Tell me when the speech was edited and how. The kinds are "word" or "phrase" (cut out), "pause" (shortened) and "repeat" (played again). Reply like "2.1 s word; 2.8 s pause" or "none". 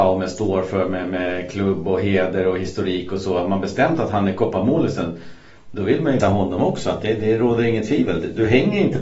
6.2 s word